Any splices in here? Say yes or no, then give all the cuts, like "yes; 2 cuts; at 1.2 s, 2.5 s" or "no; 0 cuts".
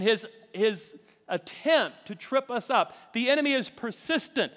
no; 0 cuts